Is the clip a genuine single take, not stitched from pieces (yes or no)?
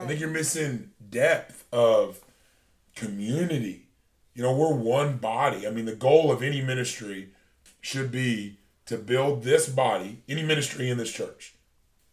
yes